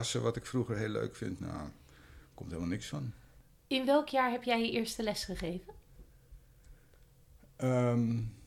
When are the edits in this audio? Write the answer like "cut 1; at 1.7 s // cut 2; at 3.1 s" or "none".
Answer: none